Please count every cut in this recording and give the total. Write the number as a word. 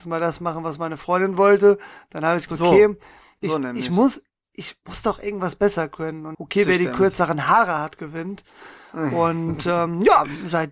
two